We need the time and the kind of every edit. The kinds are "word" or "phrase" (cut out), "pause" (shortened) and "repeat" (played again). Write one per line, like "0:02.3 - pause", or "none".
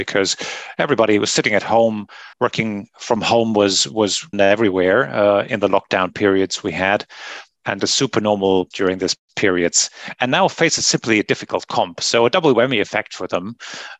0:02.3 - pause
0:04.3 - word
0:05.5 - word
0:07.8 - phrase
0:08.7 - word